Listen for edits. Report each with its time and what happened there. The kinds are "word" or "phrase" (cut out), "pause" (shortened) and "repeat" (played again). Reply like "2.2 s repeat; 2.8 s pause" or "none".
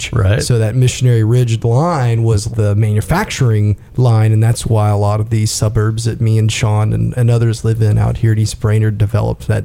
2.5 s word; 3.9 s pause